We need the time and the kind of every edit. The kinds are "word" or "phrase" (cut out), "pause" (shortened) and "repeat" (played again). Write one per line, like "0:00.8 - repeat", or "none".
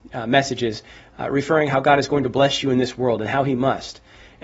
none